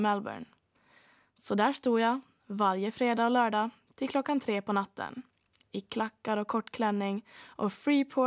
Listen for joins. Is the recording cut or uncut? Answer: uncut